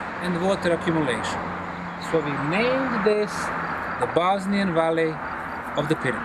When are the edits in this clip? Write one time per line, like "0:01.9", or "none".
none